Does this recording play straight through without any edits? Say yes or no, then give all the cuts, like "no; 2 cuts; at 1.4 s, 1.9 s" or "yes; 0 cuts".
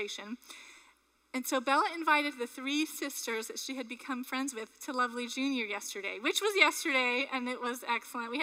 yes; 0 cuts